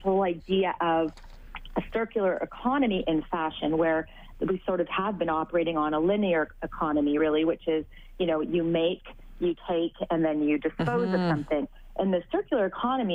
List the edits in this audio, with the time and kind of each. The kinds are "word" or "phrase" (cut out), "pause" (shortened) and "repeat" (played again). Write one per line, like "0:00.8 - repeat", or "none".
none